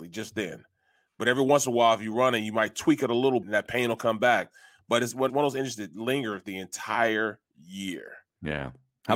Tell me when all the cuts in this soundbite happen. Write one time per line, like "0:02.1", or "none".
0:03.4
0:05.3